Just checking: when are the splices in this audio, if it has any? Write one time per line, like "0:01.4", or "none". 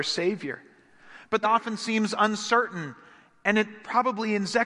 0:01.4

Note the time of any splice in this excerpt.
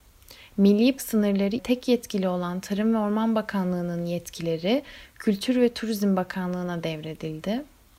0:01.0
0:01.6

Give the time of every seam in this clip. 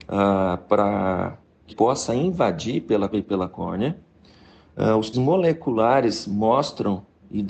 0:01.7
0:03.1
0:05.1

